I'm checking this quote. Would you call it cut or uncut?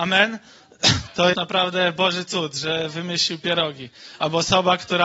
cut